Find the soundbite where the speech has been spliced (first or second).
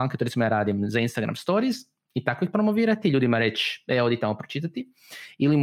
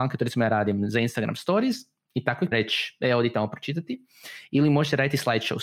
second